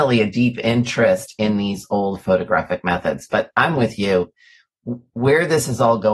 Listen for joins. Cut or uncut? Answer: uncut